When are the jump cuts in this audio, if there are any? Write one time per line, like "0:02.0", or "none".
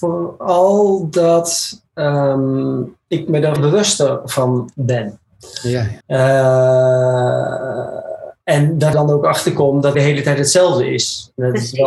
0:03.0
0:03.6
0:06.0
0:08.4
0:08.9
0:09.9